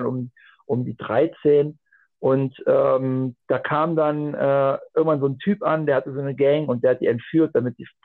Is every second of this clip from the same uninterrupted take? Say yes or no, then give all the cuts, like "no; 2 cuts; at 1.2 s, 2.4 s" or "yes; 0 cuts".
yes; 0 cuts